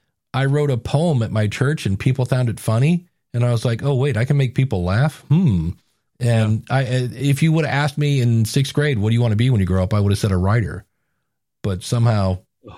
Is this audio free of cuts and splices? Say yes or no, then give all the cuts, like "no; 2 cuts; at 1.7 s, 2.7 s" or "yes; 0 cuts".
yes; 0 cuts